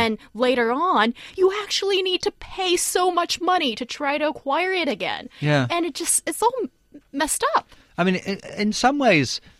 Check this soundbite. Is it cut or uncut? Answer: uncut